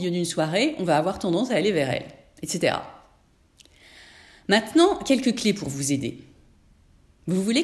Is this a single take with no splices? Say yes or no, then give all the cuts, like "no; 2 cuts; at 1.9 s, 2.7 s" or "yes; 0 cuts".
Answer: yes; 0 cuts